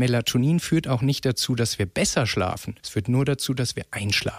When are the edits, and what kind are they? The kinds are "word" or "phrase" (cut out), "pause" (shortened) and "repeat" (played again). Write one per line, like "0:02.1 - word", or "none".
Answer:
0:02.8 - pause